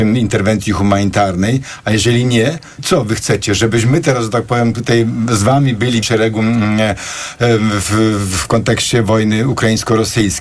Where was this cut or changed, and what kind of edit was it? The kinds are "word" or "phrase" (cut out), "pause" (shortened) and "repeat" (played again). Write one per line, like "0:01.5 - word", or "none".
0:02.8 - word
0:06.0 - word
0:08.4 - word